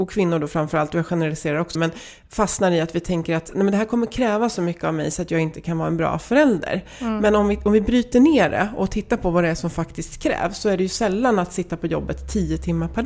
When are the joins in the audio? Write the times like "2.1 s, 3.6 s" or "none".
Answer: 1.8 s